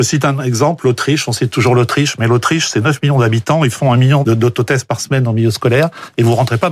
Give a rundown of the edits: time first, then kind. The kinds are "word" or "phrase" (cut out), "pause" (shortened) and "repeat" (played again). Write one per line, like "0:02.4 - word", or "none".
0:04.2 - word